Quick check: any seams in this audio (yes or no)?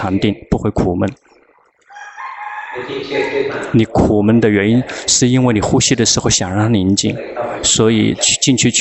no